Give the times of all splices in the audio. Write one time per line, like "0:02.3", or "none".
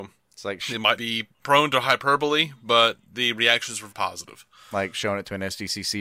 0:01.0
0:03.9

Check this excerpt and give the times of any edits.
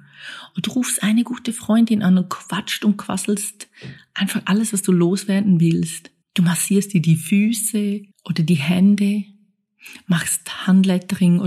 0:06.2
0:08.1

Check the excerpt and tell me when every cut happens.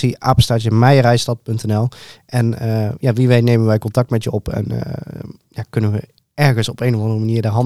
none

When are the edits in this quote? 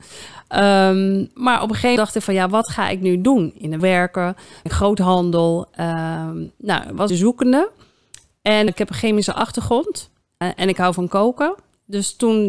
0:02.0
0:03.8
0:04.7
0:07.1
0:08.7
0:10.4

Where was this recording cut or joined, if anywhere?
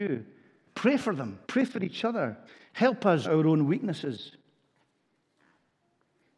0:01.4
0:02.5
0:03.2

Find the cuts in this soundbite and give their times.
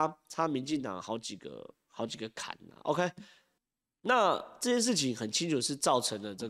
0:03.6

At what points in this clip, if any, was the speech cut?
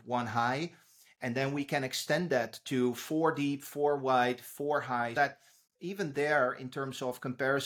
0:05.1

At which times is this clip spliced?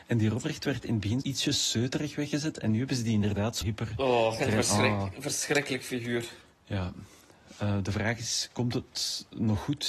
0:01.2
0:03.6
0:04.4
0:06.4

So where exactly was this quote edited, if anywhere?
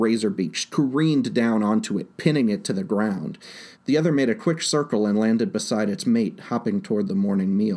0:03.7

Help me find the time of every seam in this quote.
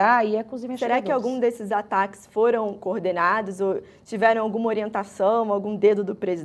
none

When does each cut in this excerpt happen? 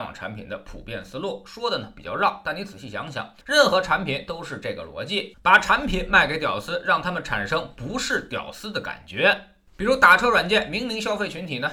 0:03.4

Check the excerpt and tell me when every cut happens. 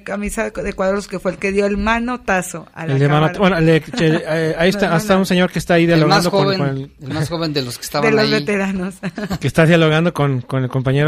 none

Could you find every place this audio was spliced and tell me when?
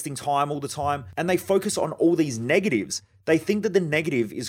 none

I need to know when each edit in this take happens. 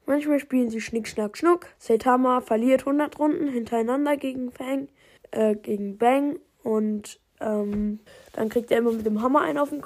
0:01.7
0:05.2
0:08.1

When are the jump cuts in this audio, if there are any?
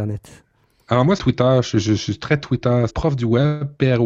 0:01.2
0:02.9

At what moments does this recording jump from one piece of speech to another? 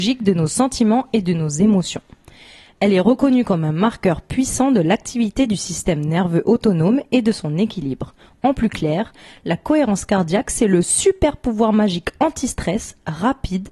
none

